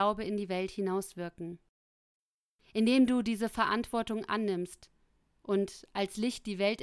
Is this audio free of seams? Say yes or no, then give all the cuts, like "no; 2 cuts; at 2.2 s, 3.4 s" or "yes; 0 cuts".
yes; 0 cuts